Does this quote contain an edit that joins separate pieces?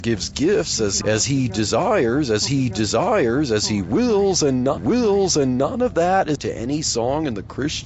yes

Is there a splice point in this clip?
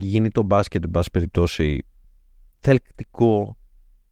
yes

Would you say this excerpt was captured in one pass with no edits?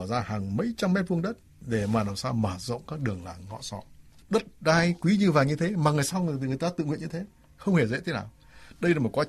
yes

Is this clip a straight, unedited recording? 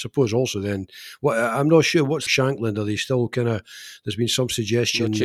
no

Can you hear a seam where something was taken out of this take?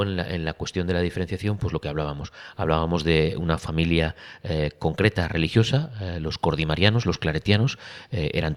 no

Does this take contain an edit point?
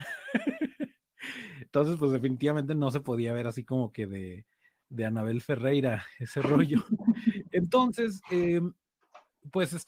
no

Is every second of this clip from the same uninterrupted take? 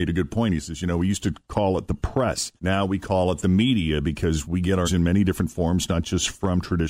no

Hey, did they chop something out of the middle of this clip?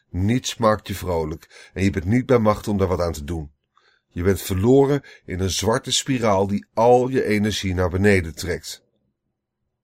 no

